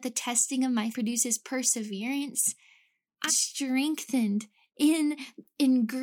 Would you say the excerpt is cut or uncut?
cut